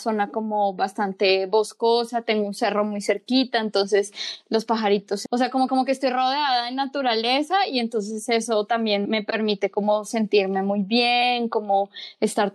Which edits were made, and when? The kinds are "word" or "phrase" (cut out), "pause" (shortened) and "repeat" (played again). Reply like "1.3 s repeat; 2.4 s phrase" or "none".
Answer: 5.3 s phrase; 5.7 s repeat; 9.0 s word